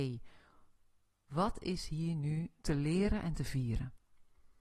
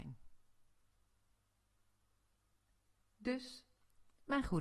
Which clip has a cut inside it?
first; 1 cut; at 2.6 s

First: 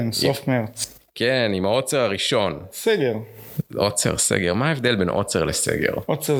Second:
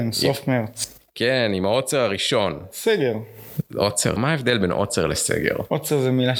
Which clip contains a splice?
second; 1 cut; at 4.2 s

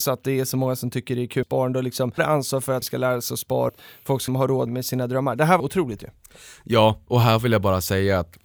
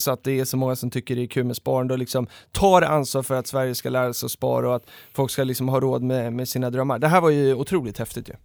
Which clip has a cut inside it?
first; 8 cuts; at 1.4 s, 2.2 s, 2.8 s, 3.7 s, 4.3 s, 4.7 s, 5.6 s, 6.0 s

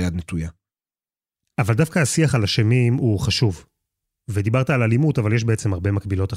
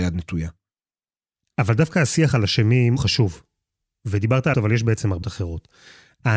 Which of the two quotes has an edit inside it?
second; 3 cuts; at 3.0 s, 4.5 s, 5.2 s

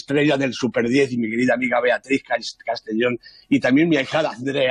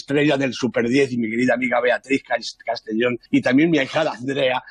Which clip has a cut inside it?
second; 1 cut; at 3.3 s

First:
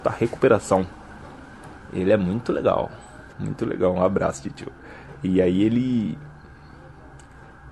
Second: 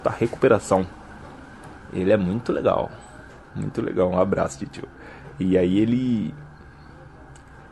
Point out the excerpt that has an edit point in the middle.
first; 1 cut; at 3.3 s

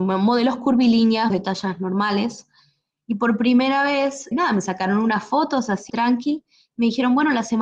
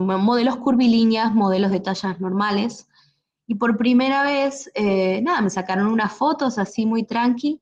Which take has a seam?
first; 3 cuts; at 1.3 s, 4.3 s, 5.9 s

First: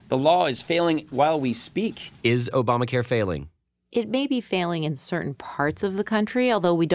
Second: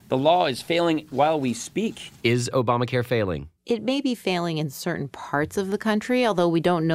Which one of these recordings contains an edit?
second; 1 cut; at 3.6 s

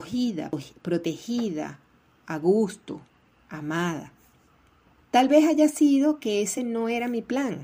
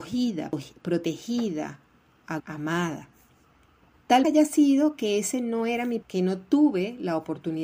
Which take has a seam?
second; 3 cuts; at 2.4 s, 4.2 s, 6.0 s

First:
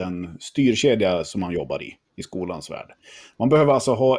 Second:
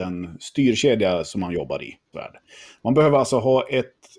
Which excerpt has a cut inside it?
second; 1 cut; at 2.1 s

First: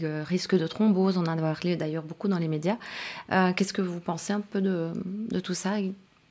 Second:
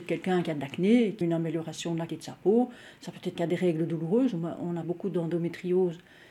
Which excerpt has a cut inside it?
second; 4 cuts; at 1.2 s, 2.1 s, 3.4 s, 4.8 s

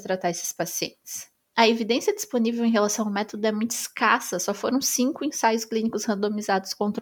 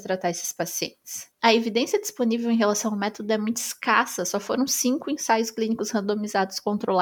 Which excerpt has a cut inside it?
second; 1 cut; at 1.3 s

